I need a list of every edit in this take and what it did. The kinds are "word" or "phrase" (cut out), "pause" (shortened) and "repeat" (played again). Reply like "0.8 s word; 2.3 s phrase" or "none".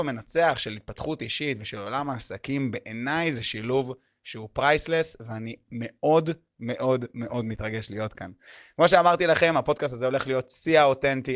none